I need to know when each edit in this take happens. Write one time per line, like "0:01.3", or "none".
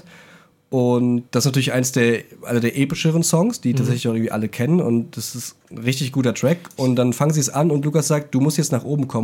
0:01.3
0:05.6

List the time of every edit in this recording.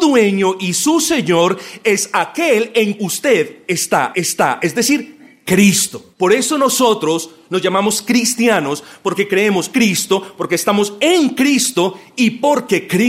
0:03.0
0:04.1
0:06.1
0:09.7

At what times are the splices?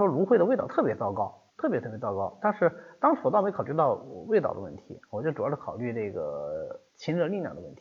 0:01.5
0:06.9

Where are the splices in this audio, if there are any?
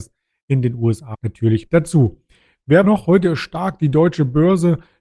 0:01.1
0:01.7
0:02.8

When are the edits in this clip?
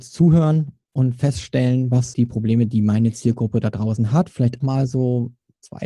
0:02.1
0:04.6

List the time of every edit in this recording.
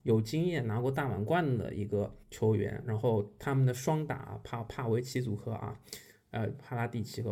0:02.2

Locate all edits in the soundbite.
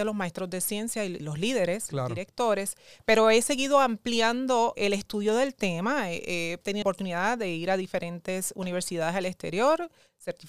0:01.2
0:04.8
0:06.8

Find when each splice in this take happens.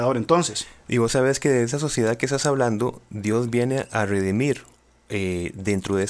none

